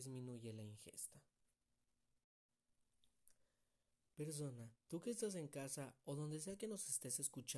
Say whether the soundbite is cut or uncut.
cut